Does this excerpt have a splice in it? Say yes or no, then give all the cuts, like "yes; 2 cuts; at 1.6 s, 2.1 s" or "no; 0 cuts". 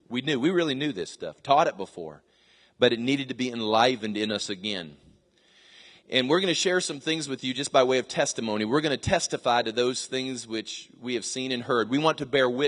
no; 0 cuts